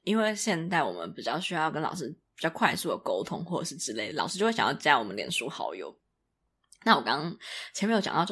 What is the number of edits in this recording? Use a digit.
0